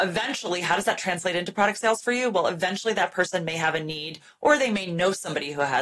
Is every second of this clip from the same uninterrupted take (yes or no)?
yes